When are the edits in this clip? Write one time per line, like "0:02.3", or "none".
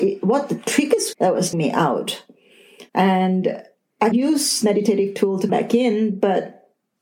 0:01.1
0:01.5
0:02.9
0:04.1
0:04.6
0:05.5

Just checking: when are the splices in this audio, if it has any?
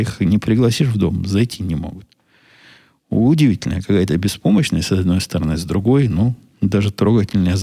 none

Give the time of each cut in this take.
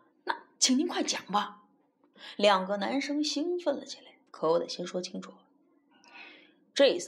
0:04.3

